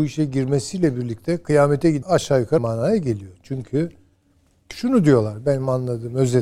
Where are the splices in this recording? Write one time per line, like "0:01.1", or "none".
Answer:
0:02.0
0:02.6